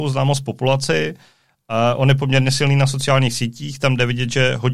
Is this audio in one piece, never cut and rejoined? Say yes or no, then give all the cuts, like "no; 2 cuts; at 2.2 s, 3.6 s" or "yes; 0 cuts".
yes; 0 cuts